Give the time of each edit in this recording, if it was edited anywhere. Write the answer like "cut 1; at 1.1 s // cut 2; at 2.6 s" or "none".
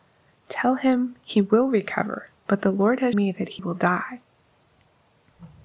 cut 1; at 2.4 s // cut 2; at 3.1 s // cut 3; at 3.6 s